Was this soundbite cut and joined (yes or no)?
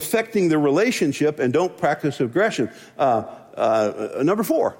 no